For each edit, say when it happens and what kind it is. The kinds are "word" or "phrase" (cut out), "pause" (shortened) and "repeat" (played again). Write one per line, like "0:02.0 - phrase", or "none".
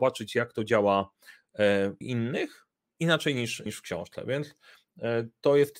0:02.0 - word
0:02.8 - pause
0:03.7 - word